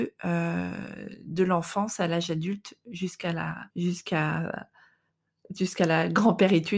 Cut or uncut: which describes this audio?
cut